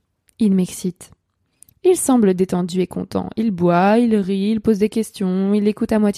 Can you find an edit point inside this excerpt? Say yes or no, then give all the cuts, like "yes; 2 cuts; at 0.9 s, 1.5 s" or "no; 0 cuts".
no; 0 cuts